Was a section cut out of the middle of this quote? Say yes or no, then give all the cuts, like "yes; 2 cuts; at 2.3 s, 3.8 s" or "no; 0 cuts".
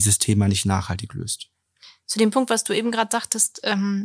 no; 0 cuts